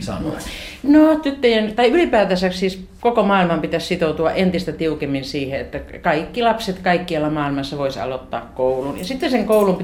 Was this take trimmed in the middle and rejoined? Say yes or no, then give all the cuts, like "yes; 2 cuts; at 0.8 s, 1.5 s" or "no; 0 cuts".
no; 0 cuts